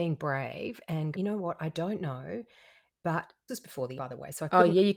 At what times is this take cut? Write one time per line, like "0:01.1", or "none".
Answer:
0:01.1
0:03.5
0:04.0

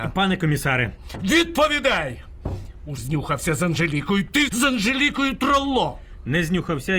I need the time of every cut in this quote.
0:03.0
0:04.5

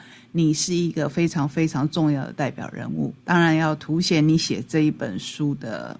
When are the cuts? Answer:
0:03.2

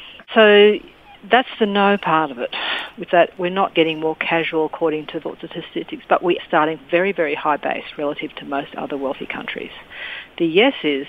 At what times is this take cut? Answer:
0:03.1
0:03.7
0:05.2
0:06.4
0:06.8

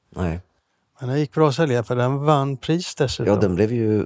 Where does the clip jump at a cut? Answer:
none

